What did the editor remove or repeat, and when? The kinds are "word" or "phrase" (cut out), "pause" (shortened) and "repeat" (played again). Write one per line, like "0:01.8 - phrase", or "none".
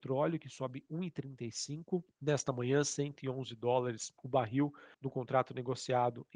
0:02.1 - pause
0:04.2 - pause
0:04.9 - pause